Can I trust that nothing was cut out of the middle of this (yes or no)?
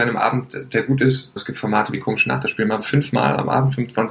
no